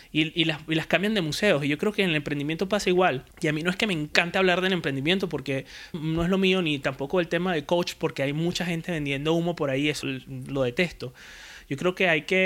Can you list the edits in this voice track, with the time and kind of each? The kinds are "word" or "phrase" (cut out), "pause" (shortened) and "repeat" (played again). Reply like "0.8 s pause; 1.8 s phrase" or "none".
3.3 s pause; 5.9 s word; 10.0 s word